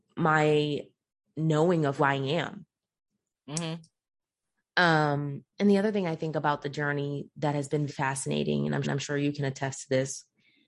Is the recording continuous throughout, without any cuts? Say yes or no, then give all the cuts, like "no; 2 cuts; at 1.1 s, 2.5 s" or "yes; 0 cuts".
no; 4 cuts; at 2.0 s, 5.5 s, 7.9 s, 8.8 s